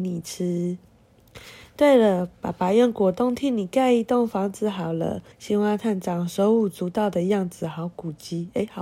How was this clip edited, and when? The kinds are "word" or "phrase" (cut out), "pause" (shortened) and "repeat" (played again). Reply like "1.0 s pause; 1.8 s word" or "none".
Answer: 5.3 s pause